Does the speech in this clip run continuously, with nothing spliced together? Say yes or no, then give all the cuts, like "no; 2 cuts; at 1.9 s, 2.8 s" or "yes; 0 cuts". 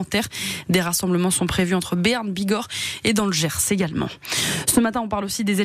yes; 0 cuts